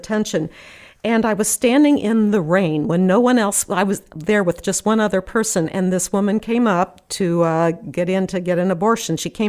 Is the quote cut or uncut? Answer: uncut